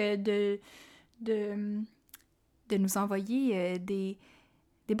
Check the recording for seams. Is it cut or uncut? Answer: uncut